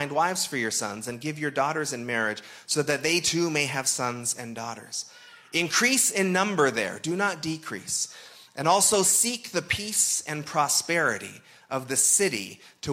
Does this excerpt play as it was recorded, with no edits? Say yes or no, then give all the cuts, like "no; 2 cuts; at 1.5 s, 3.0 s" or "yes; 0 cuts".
yes; 0 cuts